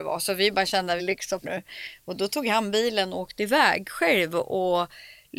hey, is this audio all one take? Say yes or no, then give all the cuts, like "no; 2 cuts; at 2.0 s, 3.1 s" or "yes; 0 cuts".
no; 2 cuts; at 1.0 s, 1.4 s